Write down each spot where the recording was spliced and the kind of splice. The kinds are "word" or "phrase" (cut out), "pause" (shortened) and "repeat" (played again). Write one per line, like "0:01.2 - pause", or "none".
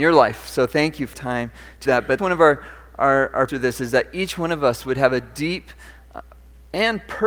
0:01.1 - word
0:01.9 - word
0:02.2 - word
0:03.5 - word